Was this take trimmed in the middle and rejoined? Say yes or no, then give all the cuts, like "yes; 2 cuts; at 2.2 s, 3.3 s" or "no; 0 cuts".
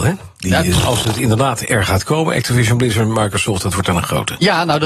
no; 0 cuts